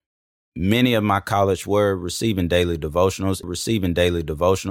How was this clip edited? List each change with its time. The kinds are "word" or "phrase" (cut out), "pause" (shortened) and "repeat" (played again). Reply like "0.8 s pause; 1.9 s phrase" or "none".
1.6 s word; 3.4 s repeat